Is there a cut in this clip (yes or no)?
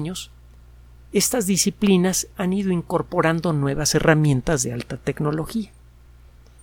no